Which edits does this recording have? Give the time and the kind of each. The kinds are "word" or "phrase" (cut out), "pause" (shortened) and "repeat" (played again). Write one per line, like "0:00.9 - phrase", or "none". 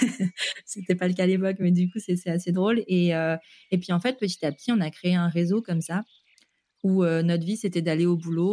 none